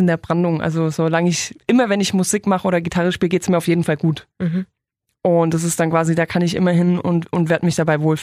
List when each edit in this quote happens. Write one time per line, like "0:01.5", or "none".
none